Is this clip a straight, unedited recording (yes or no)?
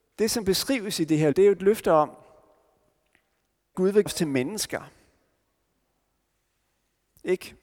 no